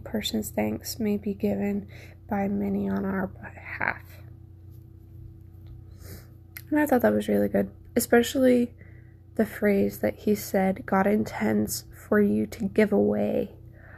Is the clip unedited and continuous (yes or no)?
yes